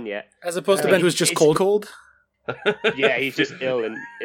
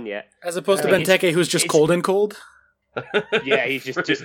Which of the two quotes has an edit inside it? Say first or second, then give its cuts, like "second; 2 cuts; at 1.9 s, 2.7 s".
first; 3 cuts; at 1.0 s, 1.5 s, 3.3 s